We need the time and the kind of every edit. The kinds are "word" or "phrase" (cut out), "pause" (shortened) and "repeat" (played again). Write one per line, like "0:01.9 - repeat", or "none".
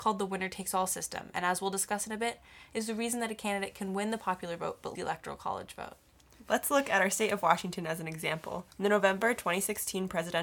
0:05.0 - word
0:08.7 - pause